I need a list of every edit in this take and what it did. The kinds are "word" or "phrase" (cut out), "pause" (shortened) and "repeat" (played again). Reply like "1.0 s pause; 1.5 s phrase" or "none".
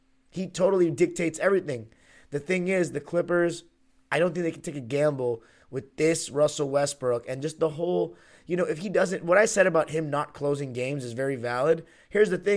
none